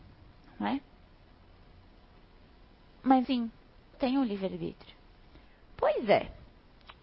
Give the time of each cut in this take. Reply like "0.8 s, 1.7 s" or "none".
3.2 s, 3.9 s